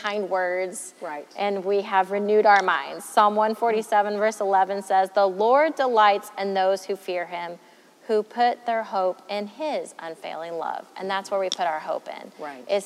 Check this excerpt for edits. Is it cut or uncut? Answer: uncut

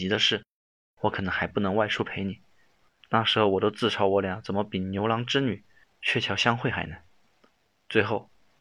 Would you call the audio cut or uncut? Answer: uncut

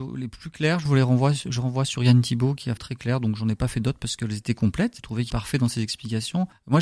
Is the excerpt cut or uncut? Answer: cut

